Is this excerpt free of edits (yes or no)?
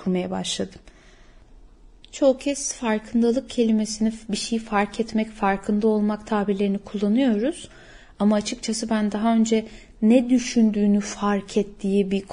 yes